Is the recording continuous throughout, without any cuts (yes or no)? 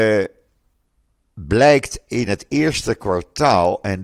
yes